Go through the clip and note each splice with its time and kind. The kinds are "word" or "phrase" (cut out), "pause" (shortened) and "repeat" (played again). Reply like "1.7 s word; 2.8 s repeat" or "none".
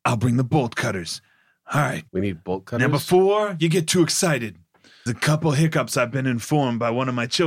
2.1 s pause; 5.1 s word